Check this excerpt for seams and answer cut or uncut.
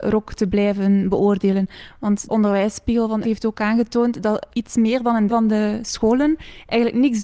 cut